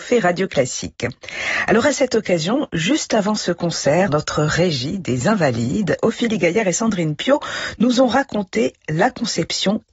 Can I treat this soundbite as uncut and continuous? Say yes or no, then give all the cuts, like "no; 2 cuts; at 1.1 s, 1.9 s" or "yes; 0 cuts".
no; 1 cut; at 4.1 s